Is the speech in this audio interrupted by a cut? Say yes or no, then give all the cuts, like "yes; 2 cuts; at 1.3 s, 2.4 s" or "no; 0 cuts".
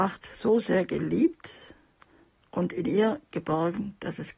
no; 0 cuts